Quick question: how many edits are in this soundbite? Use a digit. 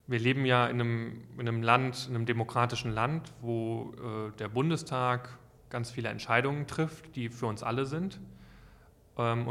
0